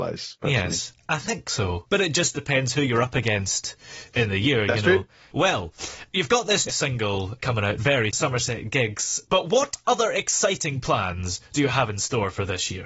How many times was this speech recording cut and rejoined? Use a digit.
2